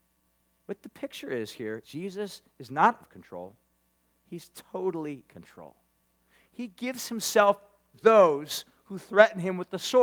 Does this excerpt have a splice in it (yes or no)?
yes